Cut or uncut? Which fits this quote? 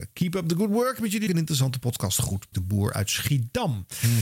cut